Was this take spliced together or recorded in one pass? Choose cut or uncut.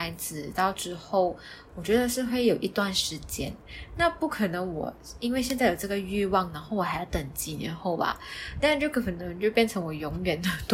uncut